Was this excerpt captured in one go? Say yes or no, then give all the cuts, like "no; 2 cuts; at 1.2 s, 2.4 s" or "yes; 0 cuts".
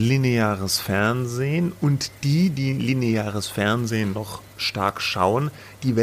yes; 0 cuts